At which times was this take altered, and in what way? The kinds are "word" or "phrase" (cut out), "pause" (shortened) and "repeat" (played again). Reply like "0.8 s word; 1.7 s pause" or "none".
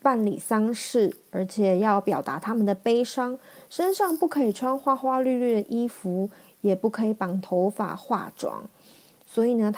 none